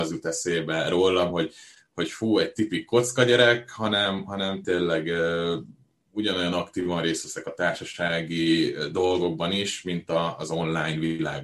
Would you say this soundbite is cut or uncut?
uncut